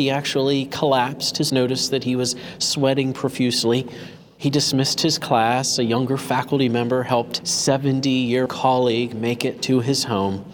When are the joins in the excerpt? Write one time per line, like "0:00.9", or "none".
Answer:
0:01.5
0:07.4
0:08.5